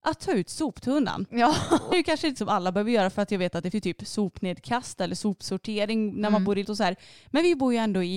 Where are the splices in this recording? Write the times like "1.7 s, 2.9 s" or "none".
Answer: 1.9 s, 2.4 s, 3.7 s, 6.6 s